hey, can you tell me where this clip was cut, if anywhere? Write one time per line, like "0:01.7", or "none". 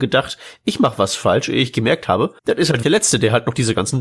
0:02.4
0:02.8